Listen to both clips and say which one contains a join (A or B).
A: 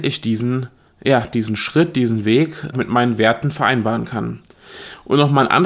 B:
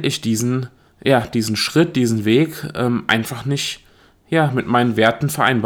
A